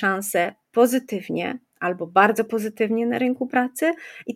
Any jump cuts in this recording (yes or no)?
no